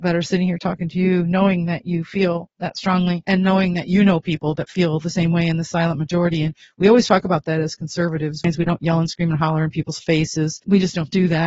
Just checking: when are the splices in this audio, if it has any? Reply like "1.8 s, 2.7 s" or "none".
none